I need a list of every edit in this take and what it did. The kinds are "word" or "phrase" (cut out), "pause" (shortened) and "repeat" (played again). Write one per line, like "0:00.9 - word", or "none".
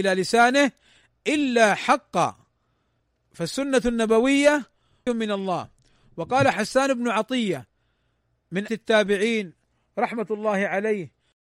0:05.1 - word
0:08.7 - word